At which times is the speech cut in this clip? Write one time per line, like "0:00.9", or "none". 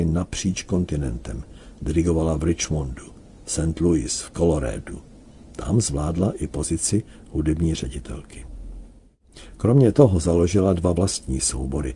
none